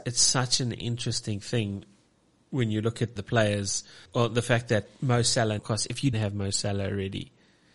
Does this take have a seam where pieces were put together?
yes; 4 cuts; at 3.2 s, 4.1 s, 5.6 s, 6.1 s

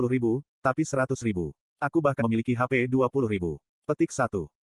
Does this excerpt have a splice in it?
yes; 1 cut; at 2.2 s

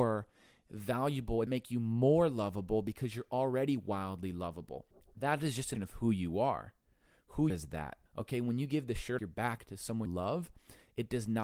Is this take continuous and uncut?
no; 7 cuts; at 1.5 s, 4.9 s, 5.7 s, 7.5 s, 8.1 s, 9.2 s, 10.1 s

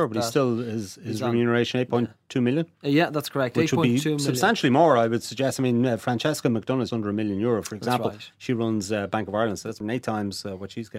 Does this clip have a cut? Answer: yes; 2 cuts; at 6.9 s, 9.8 s

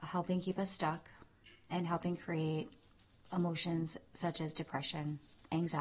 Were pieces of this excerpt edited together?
no; 0 cuts

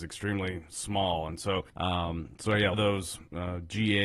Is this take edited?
yes; 2 cuts; at 1.7 s, 2.7 s

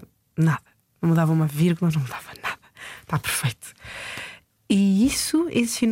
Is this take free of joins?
yes; 0 cuts

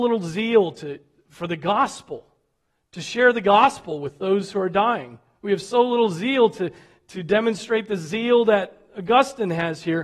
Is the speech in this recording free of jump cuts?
yes; 0 cuts

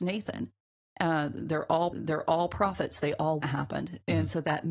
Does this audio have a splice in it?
yes; 2 cuts; at 1.9 s, 3.4 s

